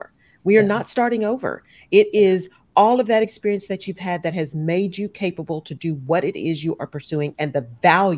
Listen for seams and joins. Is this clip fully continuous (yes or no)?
yes